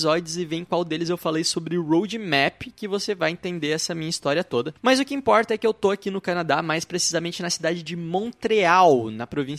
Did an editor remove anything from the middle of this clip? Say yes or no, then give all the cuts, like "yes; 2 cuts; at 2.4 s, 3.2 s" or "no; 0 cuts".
no; 0 cuts